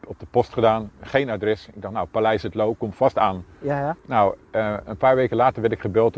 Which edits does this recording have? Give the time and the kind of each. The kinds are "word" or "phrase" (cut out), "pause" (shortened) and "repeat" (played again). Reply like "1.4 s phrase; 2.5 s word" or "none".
4.0 s pause